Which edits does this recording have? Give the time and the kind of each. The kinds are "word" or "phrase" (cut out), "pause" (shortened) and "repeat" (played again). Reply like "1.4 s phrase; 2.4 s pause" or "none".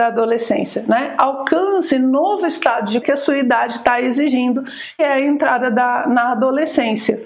1.9 s word; 3.0 s word; 5.0 s word